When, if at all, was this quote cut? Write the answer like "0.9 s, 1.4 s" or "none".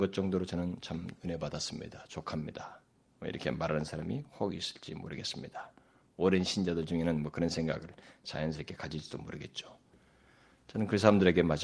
1.2 s